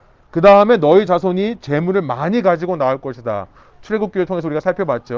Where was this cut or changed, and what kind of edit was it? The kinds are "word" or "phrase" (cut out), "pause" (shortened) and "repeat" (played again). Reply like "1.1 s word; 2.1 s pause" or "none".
none